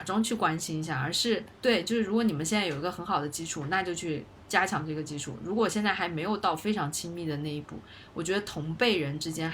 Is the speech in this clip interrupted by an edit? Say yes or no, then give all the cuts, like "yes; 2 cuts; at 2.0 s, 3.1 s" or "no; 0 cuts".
yes; 1 cut; at 1.6 s